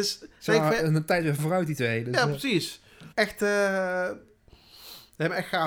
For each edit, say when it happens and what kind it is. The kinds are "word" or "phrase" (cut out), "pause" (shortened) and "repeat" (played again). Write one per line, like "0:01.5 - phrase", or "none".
0:01.4 - word
0:03.1 - pause